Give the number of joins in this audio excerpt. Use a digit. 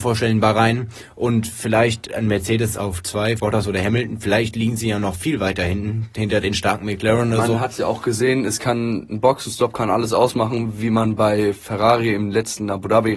1